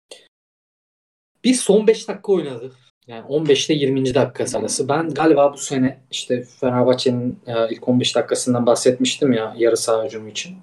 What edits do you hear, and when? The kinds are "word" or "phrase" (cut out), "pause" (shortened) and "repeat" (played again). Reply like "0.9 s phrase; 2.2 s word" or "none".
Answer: 2.9 s pause